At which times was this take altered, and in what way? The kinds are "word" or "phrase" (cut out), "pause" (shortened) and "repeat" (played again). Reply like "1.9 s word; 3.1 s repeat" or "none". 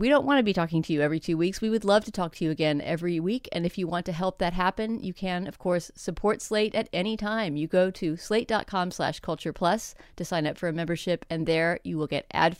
none